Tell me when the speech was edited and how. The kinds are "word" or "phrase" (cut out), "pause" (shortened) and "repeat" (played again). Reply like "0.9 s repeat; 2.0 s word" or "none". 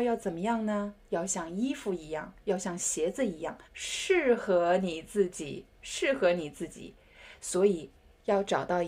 1.0 s pause; 3.6 s pause; 5.7 s pause